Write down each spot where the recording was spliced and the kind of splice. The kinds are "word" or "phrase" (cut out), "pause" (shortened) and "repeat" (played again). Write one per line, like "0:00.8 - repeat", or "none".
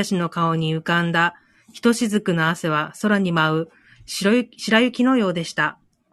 none